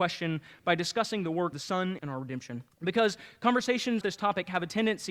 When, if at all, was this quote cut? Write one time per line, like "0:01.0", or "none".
0:01.5
0:02.0
0:02.7
0:04.0